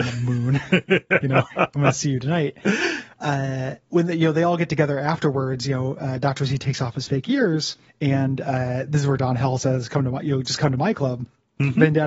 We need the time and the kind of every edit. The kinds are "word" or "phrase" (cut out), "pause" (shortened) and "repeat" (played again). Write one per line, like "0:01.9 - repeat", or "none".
0:03.9 - pause
0:07.9 - pause